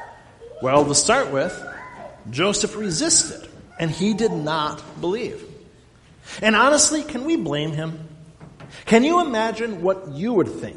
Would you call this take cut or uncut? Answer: cut